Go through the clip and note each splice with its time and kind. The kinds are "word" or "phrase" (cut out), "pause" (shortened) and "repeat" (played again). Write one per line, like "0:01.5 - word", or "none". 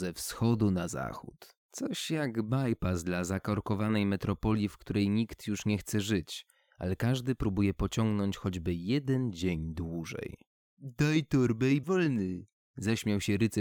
0:01.6 - pause
0:11.8 - word